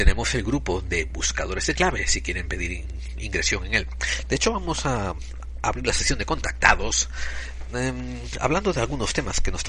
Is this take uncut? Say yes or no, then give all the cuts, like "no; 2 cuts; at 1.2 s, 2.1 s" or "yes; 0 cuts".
yes; 0 cuts